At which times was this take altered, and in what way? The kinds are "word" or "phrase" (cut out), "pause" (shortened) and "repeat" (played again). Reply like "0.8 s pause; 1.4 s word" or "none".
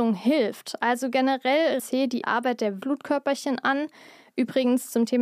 1.8 s phrase; 2.2 s word; 2.8 s word